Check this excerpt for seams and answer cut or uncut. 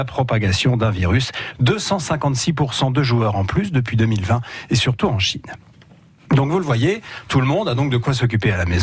uncut